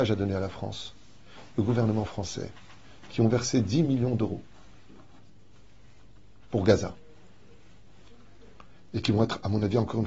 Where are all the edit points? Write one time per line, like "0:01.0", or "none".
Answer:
none